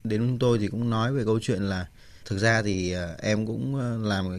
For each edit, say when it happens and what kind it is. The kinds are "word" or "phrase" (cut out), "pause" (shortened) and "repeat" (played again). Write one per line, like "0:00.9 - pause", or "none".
0:02.2 - word